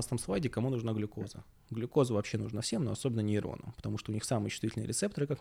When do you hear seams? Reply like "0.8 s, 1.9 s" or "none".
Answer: none